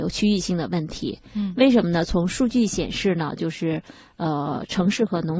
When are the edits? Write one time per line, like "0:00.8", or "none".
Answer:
none